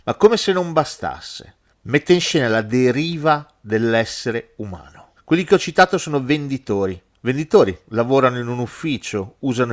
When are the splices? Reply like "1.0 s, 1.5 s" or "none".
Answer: none